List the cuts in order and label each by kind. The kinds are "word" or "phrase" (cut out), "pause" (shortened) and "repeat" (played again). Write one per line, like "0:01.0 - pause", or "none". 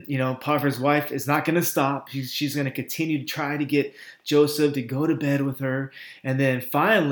none